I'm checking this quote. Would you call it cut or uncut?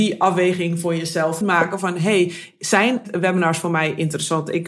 cut